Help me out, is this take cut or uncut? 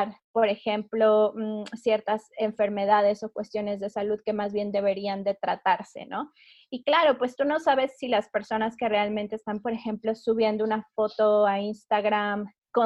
uncut